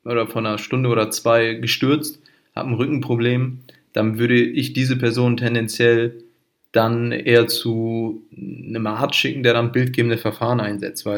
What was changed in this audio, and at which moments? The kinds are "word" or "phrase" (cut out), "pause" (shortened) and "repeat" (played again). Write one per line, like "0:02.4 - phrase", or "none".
0:08.3 - pause